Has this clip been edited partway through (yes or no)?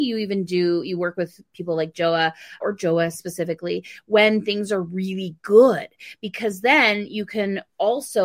yes